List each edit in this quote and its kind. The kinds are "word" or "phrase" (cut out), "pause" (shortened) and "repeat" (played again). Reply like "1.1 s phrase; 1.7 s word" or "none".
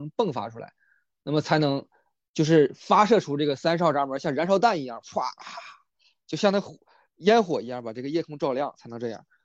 none